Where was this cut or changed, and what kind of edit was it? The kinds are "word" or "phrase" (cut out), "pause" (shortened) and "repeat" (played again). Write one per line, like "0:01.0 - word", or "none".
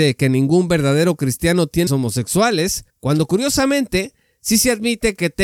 0:01.9 - word
0:02.9 - pause